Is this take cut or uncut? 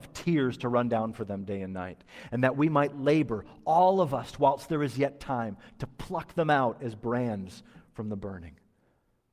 uncut